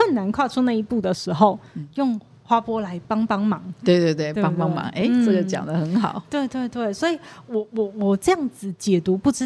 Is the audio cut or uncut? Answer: uncut